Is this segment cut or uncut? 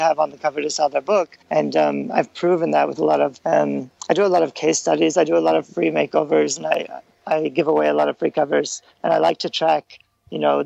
cut